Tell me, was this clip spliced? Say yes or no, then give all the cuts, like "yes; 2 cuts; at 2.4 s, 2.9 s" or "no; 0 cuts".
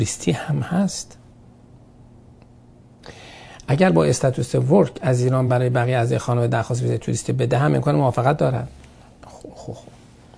no; 0 cuts